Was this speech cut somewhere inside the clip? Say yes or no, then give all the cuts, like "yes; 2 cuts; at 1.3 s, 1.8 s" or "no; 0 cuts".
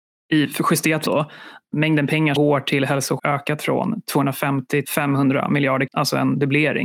yes; 7 cuts; at 1.1 s, 1.7 s, 2.3 s, 3.2 s, 3.6 s, 4.8 s, 5.9 s